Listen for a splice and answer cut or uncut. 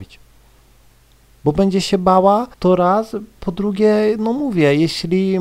cut